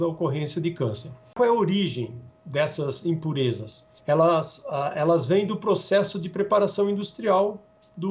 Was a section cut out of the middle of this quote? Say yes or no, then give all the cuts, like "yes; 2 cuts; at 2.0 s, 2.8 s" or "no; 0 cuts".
yes; 1 cut; at 4.0 s